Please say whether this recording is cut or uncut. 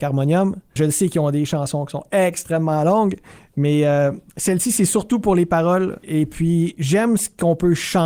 cut